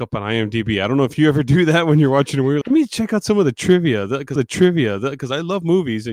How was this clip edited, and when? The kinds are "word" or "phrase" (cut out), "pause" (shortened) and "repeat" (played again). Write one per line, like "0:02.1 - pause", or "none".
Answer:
0:02.6 - word
0:04.4 - repeat